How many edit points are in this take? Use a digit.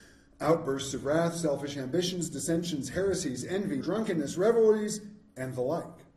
1